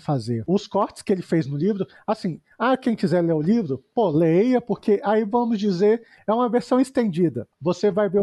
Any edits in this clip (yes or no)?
no